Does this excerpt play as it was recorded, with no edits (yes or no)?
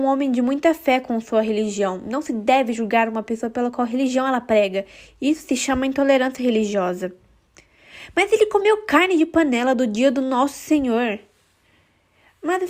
yes